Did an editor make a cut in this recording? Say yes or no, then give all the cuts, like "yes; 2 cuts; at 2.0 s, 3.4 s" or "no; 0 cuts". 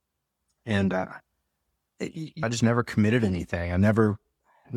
yes; 1 cut; at 2.4 s